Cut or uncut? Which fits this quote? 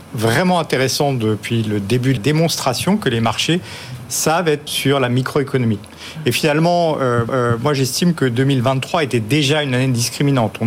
cut